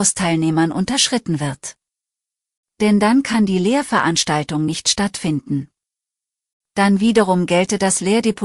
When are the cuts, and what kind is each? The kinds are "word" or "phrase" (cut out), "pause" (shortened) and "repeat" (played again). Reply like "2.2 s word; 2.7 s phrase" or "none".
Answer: none